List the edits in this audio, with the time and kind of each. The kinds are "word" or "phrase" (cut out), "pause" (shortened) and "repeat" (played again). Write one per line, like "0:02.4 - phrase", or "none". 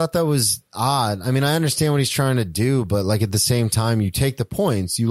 none